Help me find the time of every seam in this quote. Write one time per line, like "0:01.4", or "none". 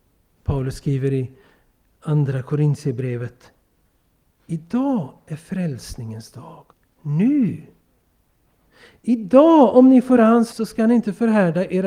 0:06.7
0:10.2
0:10.5